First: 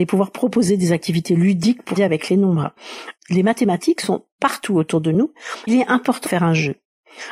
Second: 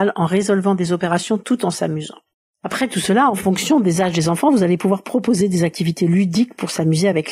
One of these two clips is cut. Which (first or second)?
first